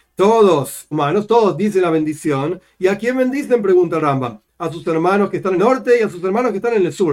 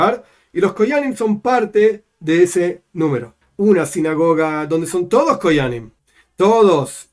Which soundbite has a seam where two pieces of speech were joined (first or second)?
first